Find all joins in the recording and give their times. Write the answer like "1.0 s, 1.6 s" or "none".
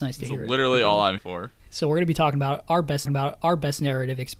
1.2 s, 1.6 s, 3.1 s